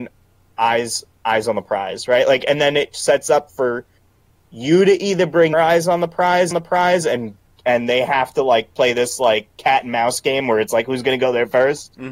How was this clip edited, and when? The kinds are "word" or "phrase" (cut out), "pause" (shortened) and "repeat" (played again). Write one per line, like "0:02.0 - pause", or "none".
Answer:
0:05.5 - word
0:06.5 - repeat

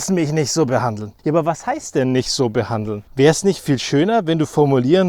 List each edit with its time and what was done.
0:01.2 - pause
0:03.1 - pause

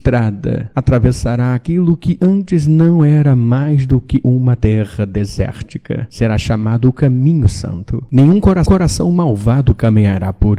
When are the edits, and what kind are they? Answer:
0:08.7 - repeat

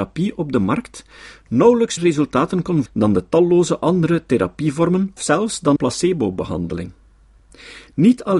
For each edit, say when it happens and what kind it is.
0:02.0 - word
0:02.9 - word
0:05.2 - word
0:05.8 - word

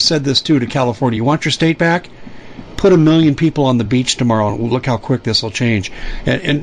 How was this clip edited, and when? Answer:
none

